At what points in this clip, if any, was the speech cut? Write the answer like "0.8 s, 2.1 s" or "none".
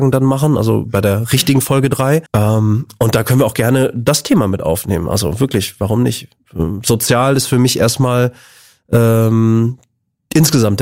2.3 s